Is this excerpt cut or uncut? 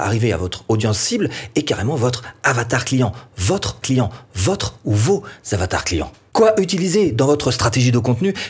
cut